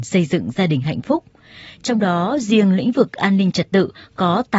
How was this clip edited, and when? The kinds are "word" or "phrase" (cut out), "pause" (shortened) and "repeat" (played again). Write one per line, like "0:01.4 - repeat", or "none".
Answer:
none